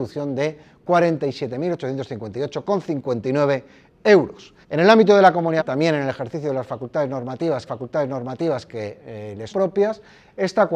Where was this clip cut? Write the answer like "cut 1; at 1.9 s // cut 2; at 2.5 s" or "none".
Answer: cut 1; at 4.6 s // cut 2; at 5.6 s // cut 3; at 7.7 s // cut 4; at 9.5 s